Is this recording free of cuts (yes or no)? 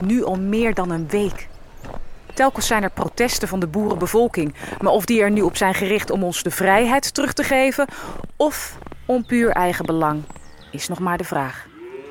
yes